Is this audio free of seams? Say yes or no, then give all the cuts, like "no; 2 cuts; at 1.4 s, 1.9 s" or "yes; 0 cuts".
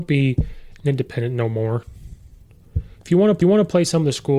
no; 1 cut; at 3.4 s